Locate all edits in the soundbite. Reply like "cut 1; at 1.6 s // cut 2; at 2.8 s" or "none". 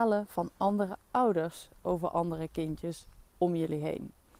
none